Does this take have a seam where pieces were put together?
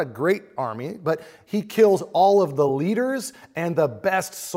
no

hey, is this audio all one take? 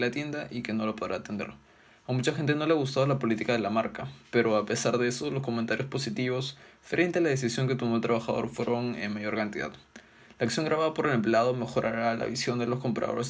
yes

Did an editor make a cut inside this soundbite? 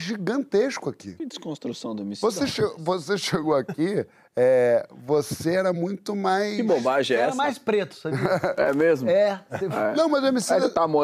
no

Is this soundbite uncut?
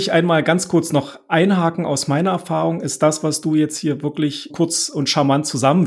no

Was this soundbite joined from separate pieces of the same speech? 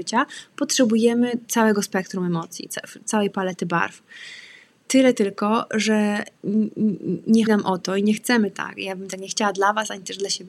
yes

